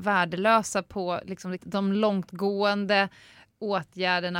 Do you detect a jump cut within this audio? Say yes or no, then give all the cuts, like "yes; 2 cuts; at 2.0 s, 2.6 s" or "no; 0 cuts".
yes; 1 cut; at 1.6 s